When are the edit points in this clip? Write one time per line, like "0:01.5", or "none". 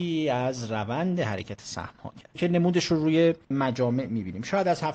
none